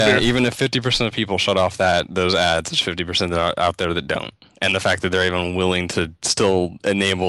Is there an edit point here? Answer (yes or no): no